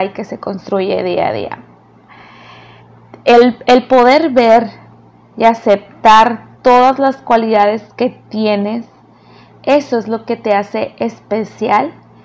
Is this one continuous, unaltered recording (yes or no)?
yes